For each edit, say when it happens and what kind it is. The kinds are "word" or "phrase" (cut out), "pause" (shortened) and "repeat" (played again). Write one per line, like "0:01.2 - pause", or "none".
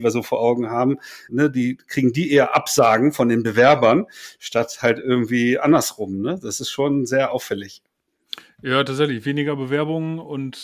0:01.3 - word